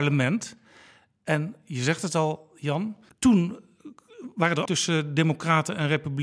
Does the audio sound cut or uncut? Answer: cut